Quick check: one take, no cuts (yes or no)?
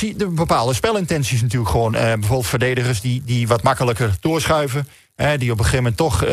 yes